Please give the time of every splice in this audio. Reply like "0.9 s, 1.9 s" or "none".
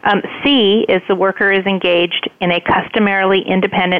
none